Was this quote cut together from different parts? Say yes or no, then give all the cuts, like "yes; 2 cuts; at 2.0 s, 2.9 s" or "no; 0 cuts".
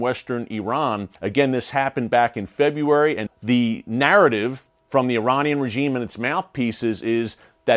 yes; 2 cuts; at 1.2 s, 3.3 s